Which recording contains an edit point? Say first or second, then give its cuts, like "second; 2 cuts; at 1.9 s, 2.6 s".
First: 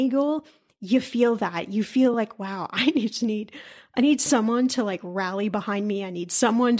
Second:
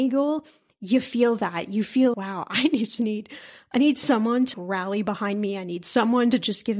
second; 2 cuts; at 2.1 s, 4.5 s